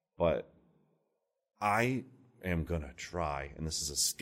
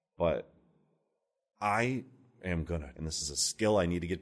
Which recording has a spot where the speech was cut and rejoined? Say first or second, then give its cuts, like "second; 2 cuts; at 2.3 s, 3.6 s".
second; 1 cut; at 2.9 s